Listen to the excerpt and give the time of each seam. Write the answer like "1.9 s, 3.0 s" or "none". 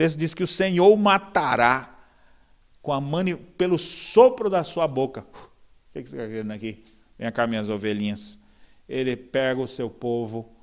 none